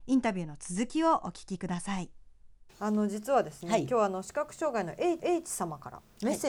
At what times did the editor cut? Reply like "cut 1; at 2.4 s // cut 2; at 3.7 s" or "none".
cut 1; at 2.7 s // cut 2; at 5.2 s